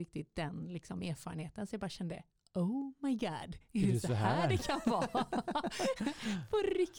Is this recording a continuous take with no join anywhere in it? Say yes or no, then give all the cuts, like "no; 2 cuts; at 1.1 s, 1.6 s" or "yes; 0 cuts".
yes; 0 cuts